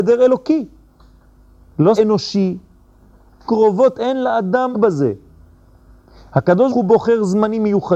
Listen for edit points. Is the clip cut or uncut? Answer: cut